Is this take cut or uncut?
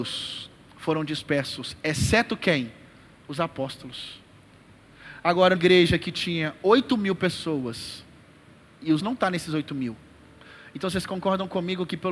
cut